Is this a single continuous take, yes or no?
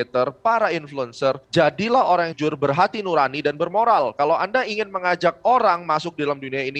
no